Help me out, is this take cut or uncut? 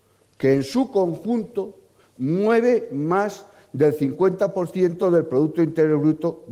uncut